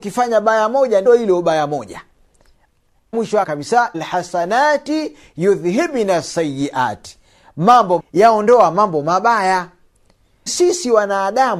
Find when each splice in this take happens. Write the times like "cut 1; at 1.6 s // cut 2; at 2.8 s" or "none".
cut 1; at 1.1 s // cut 2; at 3.1 s // cut 3; at 3.4 s // cut 4; at 3.9 s // cut 5; at 8.0 s // cut 6; at 10.5 s